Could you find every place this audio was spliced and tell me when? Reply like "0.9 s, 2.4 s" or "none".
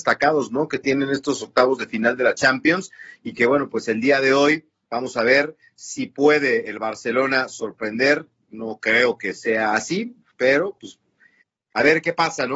none